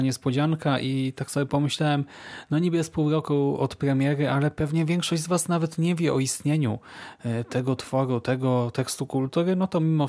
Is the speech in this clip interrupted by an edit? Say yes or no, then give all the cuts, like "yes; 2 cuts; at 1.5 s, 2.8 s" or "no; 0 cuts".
no; 0 cuts